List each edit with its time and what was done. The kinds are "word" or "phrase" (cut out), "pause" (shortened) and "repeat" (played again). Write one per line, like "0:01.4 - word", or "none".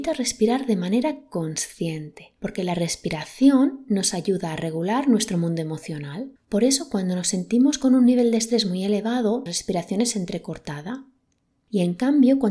0:06.4 - pause
0:09.5 - word